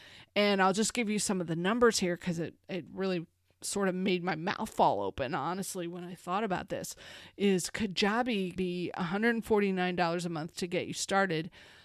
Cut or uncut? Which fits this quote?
cut